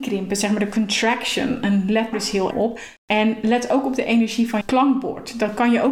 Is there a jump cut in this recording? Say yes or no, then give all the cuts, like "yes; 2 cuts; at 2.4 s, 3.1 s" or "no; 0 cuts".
yes; 4 cuts; at 2.1 s, 2.5 s, 3.0 s, 4.6 s